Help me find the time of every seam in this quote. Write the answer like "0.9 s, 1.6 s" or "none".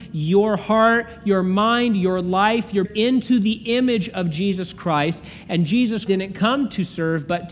2.8 s, 6.1 s

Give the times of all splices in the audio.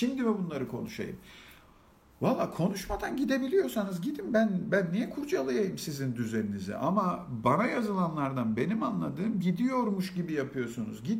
none

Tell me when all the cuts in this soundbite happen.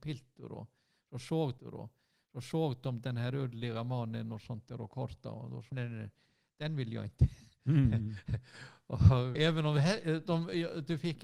1.6 s, 5.7 s, 9.3 s

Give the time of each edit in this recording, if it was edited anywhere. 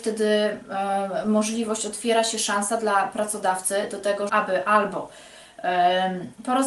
4.3 s

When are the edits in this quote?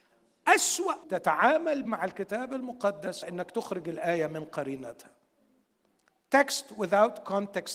1.0 s, 1.9 s, 3.2 s

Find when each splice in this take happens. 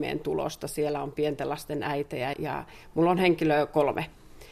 2.3 s

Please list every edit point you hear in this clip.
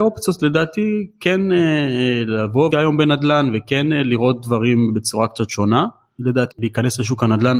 2.7 s, 6.5 s

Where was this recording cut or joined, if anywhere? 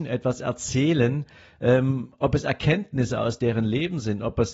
none

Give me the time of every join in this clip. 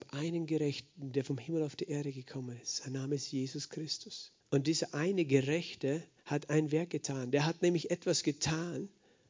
4.4 s, 6.2 s

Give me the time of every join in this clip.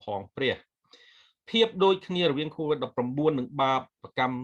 none

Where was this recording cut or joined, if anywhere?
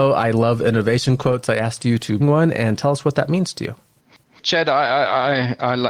2.2 s

